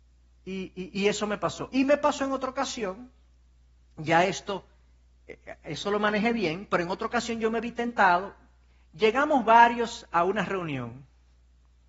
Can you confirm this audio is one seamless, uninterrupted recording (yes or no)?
yes